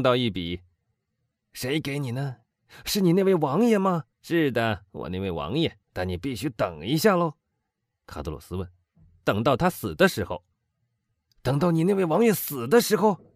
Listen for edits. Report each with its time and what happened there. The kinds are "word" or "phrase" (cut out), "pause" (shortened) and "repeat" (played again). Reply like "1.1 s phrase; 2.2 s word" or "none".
4.1 s pause; 5.8 s pause; 8.9 s pause